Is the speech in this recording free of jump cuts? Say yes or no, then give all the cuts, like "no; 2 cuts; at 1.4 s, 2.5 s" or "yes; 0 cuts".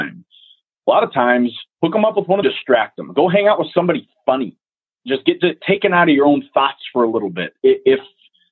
no; 3 cuts; at 1.7 s, 2.4 s, 5.6 s